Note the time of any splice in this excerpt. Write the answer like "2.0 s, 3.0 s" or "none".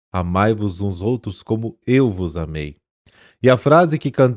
1.0 s